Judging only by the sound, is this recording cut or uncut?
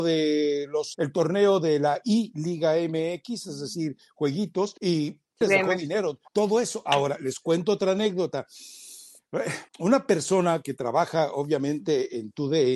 cut